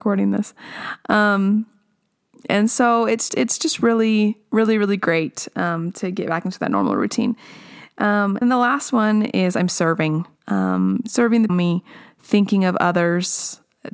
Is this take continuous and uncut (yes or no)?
no